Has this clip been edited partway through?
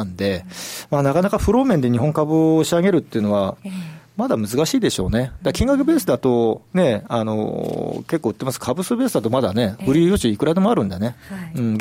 yes; 1 cut; at 6.7 s

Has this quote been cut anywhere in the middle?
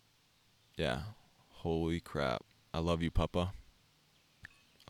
no; 0 cuts

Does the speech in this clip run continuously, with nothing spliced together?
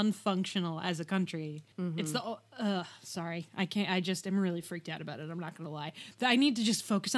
no; 1 cut; at 1.7 s

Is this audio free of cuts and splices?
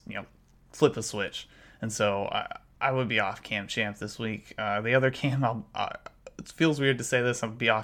yes; 0 cuts

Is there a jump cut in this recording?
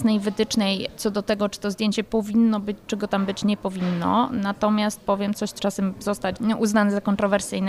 yes; 1 cut; at 5.6 s

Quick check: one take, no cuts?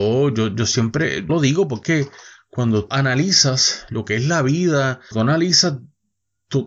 no; 4 cuts; at 1.3 s, 1.8 s, 2.9 s, 5.1 s

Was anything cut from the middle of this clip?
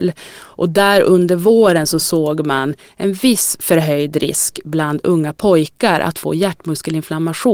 no; 0 cuts

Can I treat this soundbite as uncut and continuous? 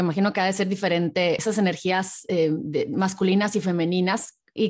yes; 0 cuts

